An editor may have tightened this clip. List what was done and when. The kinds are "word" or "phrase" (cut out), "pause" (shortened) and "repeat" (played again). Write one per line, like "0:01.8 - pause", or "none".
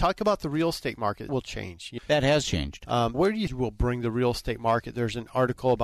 0:01.3 - phrase
0:02.0 - word
0:03.1 - word
0:03.5 - phrase